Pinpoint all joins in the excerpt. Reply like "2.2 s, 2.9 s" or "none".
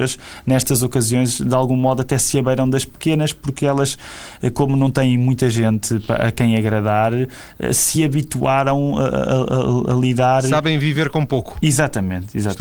none